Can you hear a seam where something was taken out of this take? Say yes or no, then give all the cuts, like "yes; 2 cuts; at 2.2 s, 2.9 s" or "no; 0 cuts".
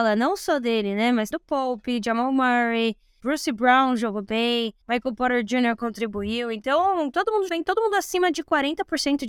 yes; 4 cuts; at 1.3 s, 3.2 s, 4.8 s, 7.5 s